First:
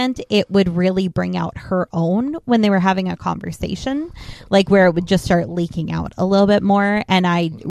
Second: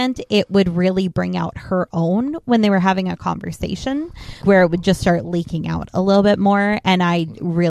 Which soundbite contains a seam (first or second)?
second